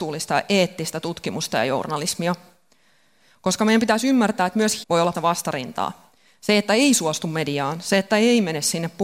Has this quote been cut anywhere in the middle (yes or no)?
yes